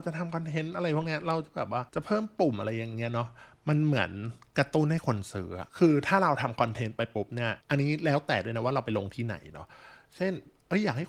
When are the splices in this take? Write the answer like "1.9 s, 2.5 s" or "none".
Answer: 1.9 s, 5.7 s, 7.6 s